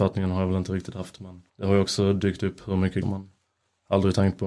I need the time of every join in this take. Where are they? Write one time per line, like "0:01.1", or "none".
0:01.5
0:03.0